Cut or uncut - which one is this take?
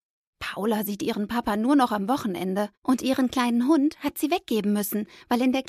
cut